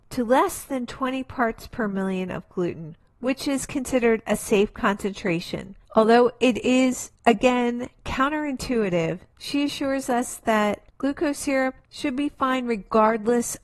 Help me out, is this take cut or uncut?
uncut